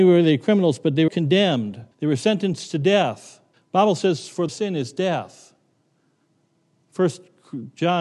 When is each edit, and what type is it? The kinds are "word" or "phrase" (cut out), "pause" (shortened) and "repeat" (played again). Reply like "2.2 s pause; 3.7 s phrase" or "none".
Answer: 1.1 s phrase; 1.9 s pause; 3.5 s pause; 4.5 s phrase